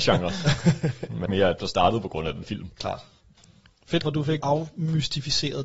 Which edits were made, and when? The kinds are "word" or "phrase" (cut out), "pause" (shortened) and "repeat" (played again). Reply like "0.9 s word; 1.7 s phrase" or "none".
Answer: 1.3 s word; 1.6 s word; 2.4 s word; 4.0 s word; 4.4 s word